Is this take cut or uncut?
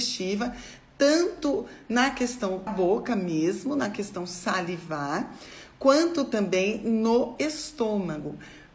cut